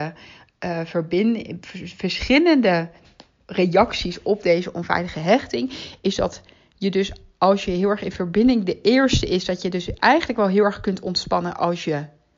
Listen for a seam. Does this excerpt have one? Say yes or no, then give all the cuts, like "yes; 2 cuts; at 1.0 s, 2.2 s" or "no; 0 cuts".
no; 0 cuts